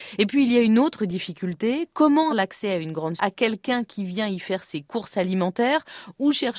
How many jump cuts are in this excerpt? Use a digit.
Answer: 2